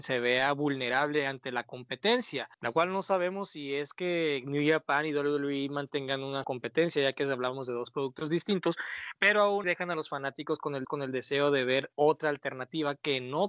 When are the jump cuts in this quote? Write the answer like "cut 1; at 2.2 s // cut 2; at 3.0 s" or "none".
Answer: cut 1; at 2.5 s // cut 2; at 6.4 s // cut 3; at 9.6 s // cut 4; at 10.8 s